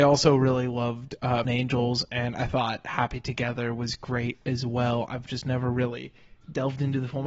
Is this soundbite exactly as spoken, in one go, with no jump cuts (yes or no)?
no